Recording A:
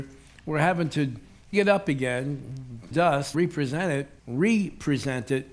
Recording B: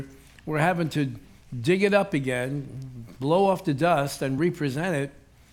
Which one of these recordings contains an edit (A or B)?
A